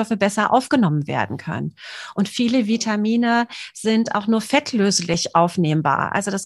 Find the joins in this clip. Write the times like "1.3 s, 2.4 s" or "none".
none

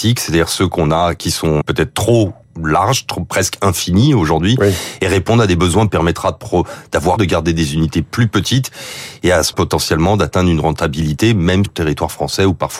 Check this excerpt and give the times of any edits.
1.6 s, 5.9 s, 7.2 s, 9.5 s, 11.6 s

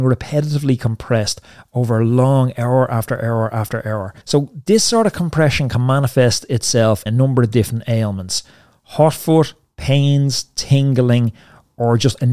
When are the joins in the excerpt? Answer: 4.2 s, 7.1 s

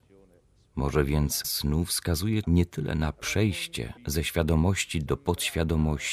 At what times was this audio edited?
1.4 s, 2.4 s, 4.0 s

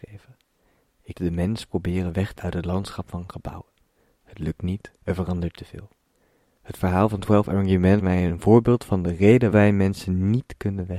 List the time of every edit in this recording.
1.1 s, 2.4 s, 5.0 s, 8.0 s, 9.5 s

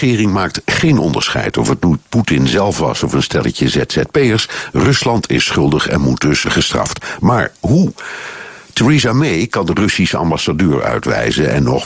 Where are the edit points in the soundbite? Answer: 6.4 s

